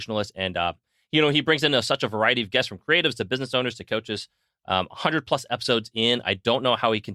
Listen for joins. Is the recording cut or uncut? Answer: uncut